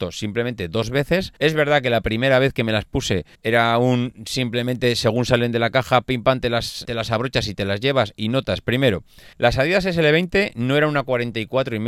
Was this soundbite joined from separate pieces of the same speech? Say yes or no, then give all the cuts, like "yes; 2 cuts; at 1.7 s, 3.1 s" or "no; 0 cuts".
yes; 4 cuts; at 1.4 s, 3.3 s, 6.8 s, 9.3 s